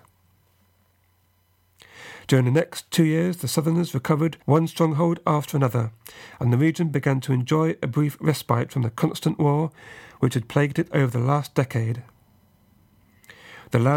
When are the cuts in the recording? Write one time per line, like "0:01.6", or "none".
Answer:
0:04.4